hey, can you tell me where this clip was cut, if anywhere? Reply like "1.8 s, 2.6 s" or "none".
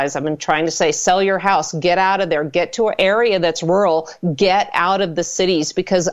none